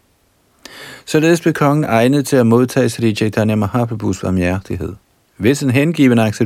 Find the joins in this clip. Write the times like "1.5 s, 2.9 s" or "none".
5.2 s